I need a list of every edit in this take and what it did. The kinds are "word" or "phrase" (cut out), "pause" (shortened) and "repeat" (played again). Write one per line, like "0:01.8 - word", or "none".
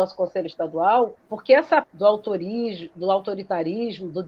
0:01.2 - pause
0:01.8 - word